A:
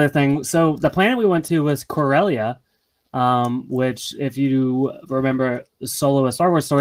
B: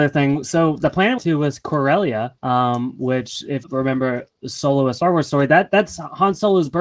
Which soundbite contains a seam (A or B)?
B